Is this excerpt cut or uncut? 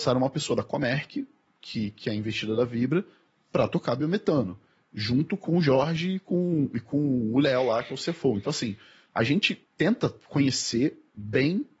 uncut